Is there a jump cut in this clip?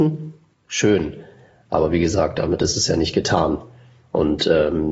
no; 0 cuts

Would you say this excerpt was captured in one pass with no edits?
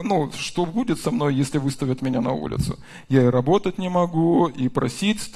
yes; 0 cuts

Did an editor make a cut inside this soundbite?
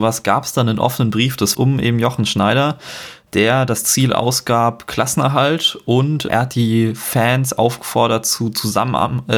yes; 2 cuts; at 1.5 s, 6.3 s

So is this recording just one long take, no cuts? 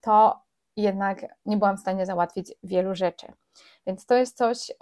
yes; 0 cuts

